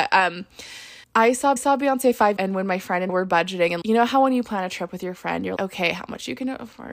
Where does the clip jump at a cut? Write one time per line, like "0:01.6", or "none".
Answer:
0:01.0
0:01.6
0:02.4
0:03.1
0:03.8
0:05.6